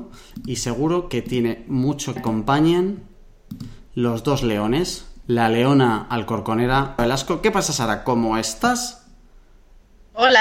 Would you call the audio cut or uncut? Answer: cut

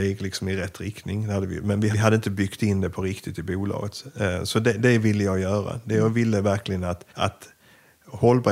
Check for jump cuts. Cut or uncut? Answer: cut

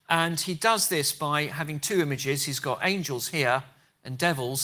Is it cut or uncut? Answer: uncut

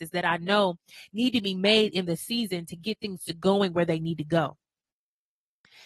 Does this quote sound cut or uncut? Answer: uncut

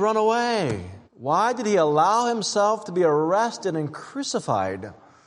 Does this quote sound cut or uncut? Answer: cut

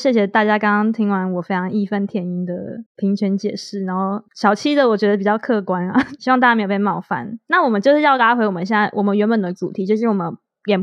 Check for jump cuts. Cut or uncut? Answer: cut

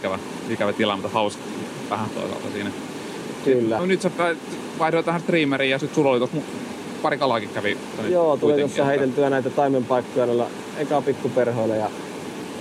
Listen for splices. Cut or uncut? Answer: cut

